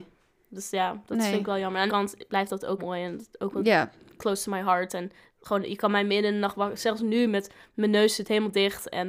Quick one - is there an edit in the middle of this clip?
yes; 2 cuts; at 1.9 s, 2.8 s

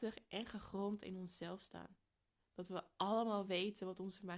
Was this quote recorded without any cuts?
yes; 0 cuts

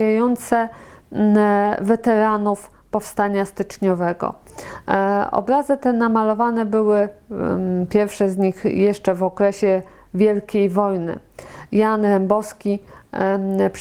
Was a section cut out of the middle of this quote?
no; 0 cuts

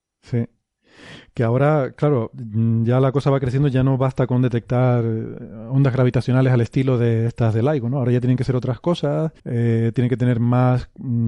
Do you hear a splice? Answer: yes; 1 cut; at 9.4 s

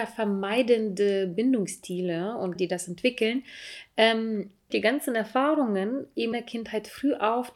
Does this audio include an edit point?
yes; 4 cuts; at 2.6 s, 2.9 s, 4.7 s, 6.3 s

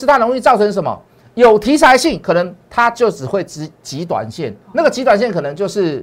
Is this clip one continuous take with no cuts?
no; 1 cut; at 4.6 s

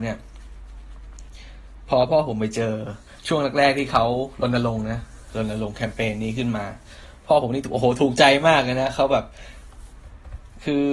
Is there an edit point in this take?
yes; 1 cut; at 3.2 s

